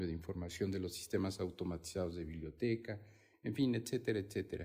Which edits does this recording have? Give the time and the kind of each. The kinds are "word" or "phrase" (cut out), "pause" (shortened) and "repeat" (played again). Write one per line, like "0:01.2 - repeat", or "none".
none